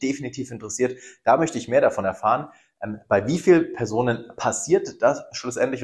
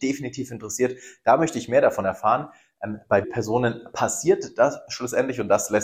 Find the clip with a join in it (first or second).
second